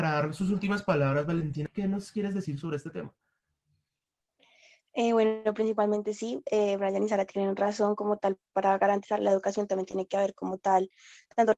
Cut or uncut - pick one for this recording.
uncut